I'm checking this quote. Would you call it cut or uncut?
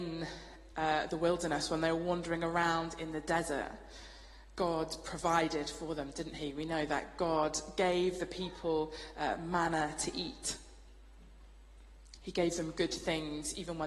uncut